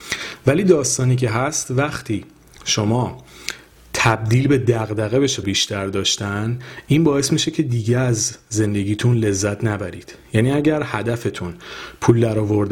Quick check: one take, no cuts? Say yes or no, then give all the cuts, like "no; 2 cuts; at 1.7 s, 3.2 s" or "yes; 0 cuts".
no; 1 cut; at 5.4 s